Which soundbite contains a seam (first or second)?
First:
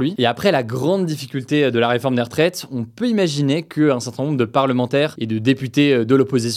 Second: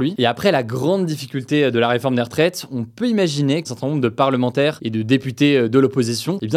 second